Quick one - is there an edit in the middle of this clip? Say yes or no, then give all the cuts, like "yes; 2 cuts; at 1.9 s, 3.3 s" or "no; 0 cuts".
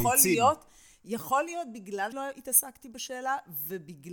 yes; 1 cut; at 2.1 s